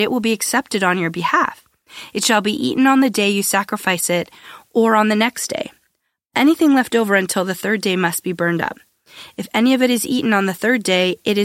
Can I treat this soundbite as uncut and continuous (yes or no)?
yes